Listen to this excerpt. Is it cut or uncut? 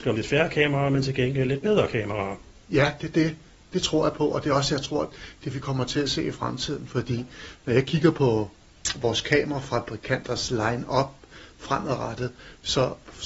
uncut